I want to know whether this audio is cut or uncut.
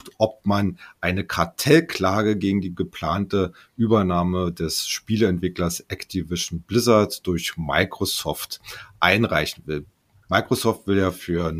uncut